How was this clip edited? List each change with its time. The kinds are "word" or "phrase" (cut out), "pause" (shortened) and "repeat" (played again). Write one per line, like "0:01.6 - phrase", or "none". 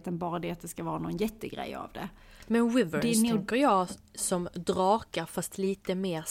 none